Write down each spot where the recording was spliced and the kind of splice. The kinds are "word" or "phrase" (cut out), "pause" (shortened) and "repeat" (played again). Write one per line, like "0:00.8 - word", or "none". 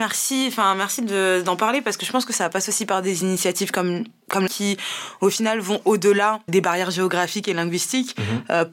0:04.5 - phrase
0:06.5 - word